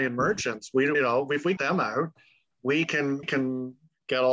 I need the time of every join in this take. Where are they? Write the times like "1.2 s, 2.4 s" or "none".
0.9 s, 1.6 s, 3.2 s